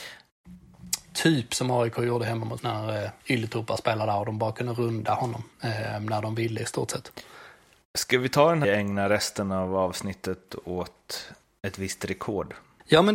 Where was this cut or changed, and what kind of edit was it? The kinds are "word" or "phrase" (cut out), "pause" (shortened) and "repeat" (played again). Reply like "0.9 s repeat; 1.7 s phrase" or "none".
2.6 s word; 3.2 s pause; 5.5 s pause; 8.6 s phrase